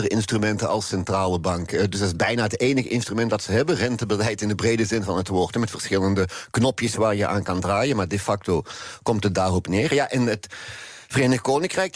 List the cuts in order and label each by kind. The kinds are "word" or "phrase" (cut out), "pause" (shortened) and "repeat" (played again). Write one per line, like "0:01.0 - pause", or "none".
none